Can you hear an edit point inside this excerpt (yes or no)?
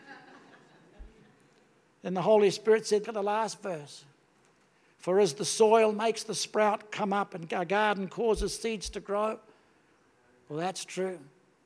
yes